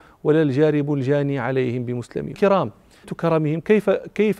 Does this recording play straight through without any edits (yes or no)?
no